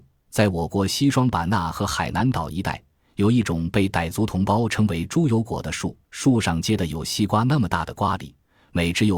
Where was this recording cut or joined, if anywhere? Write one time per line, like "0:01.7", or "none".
0:06.0